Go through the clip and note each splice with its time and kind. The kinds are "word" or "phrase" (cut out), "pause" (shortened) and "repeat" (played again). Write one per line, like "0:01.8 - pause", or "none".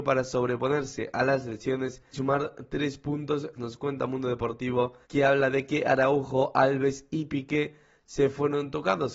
0:02.1 - word
0:03.5 - word
0:05.0 - pause